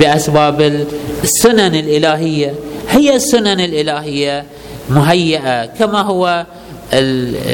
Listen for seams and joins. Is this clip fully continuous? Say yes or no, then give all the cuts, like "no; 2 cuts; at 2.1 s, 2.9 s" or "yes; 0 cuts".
yes; 0 cuts